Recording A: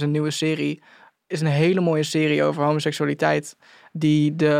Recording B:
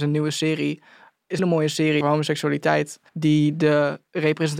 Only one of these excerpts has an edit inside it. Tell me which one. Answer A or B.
B